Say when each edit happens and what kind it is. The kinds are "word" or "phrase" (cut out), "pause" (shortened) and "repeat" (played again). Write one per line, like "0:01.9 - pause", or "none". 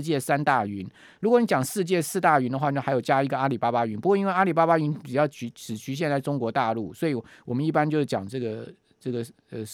none

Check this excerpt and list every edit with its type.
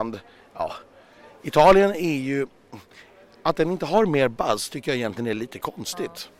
none

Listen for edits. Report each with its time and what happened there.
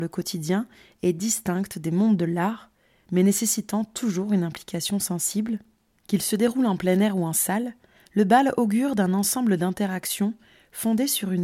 none

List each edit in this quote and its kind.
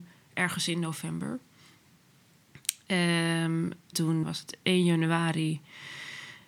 0:03.9 - word
0:04.2 - word

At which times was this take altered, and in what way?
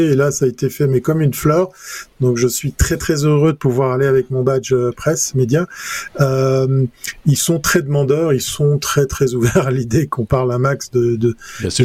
none

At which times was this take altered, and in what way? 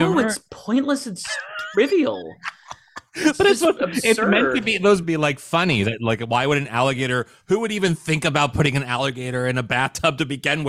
0:05.0 - phrase

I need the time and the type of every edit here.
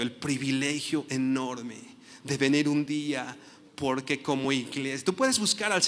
none

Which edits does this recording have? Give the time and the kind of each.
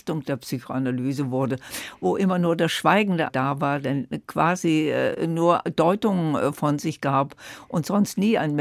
0:03.3 - word

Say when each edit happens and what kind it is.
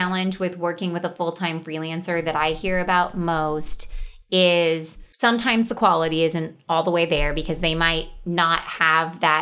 0:05.1 - pause

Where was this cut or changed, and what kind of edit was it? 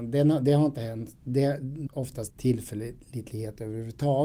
0:01.9 - word
0:02.3 - word

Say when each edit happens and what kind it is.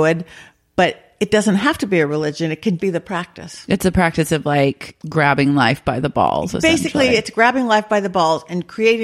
0:02.8 - word

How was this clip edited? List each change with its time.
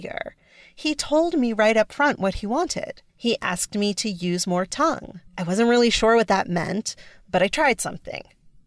0:03.1 - pause
0:05.3 - pause

